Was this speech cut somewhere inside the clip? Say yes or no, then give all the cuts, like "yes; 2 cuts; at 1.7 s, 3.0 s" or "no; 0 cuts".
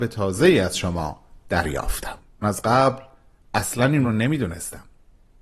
yes; 2 cuts; at 2.4 s, 4.0 s